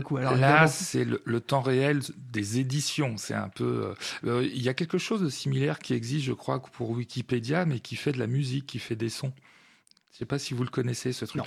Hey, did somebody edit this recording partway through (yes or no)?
no